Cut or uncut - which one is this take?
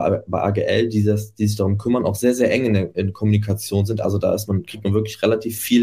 uncut